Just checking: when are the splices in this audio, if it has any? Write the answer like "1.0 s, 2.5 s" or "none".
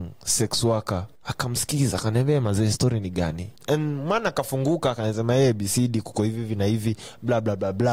1.2 s, 3.6 s